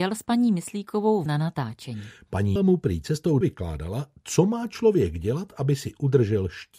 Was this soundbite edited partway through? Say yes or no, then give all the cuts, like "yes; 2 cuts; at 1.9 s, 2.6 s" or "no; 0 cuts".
yes; 3 cuts; at 1.3 s, 2.6 s, 3.4 s